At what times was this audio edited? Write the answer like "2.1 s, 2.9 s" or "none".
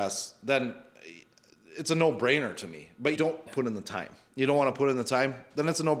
3.1 s, 3.5 s

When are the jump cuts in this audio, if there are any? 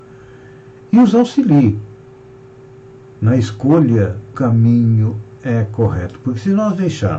4.3 s

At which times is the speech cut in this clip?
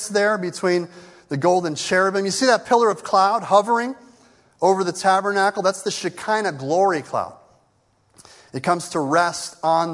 none

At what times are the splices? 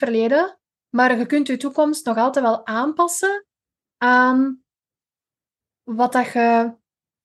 none

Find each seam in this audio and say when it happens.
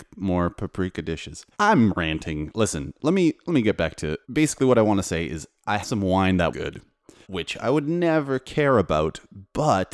1.5 s, 4.2 s, 5.8 s, 6.5 s, 7.2 s

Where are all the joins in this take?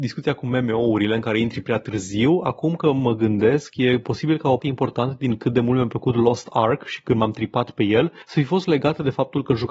4.6 s

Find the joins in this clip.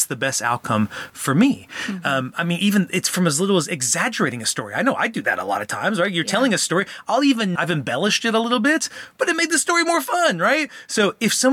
7.6 s

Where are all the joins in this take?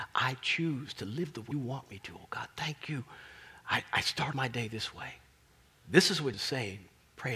1.5 s, 4.3 s, 5.6 s, 6.3 s

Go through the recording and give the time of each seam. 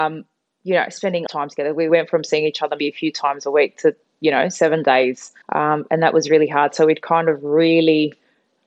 1.3 s, 1.9 s, 2.8 s, 5.4 s

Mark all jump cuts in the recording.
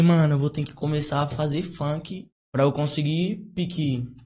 2.3 s

